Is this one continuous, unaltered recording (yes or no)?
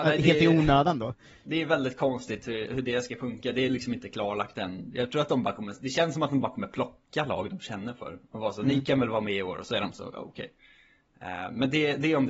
yes